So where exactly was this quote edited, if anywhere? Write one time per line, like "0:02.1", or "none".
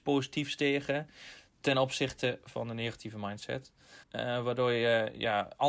0:04.0